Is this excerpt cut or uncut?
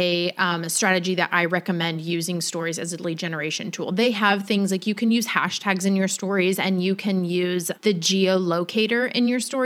cut